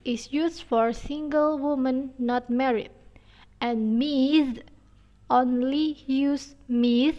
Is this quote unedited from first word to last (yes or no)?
yes